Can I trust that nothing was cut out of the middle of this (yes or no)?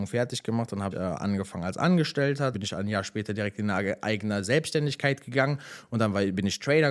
no